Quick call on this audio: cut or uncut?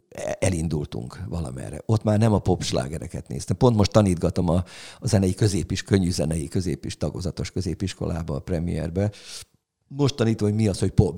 uncut